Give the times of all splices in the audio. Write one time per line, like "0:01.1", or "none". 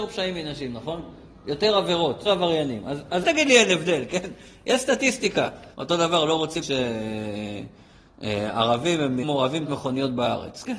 0:02.3
0:03.2
0:05.7
0:06.6
0:09.2
0:09.6